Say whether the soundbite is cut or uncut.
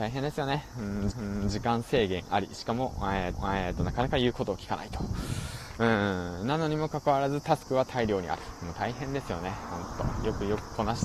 cut